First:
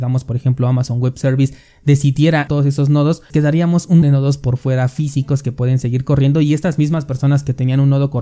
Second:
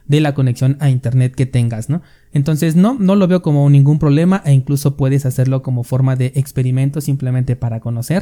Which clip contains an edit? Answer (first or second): first